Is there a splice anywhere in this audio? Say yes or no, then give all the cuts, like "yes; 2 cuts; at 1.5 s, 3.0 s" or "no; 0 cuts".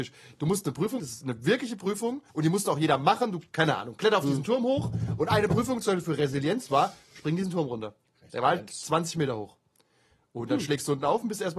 yes; 2 cuts; at 1.0 s, 2.3 s